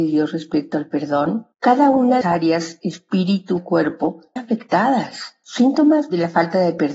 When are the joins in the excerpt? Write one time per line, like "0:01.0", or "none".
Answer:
0:01.5
0:02.2
0:03.6
0:04.4